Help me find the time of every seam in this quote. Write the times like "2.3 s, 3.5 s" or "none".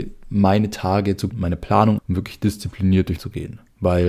1.3 s, 2.0 s, 3.2 s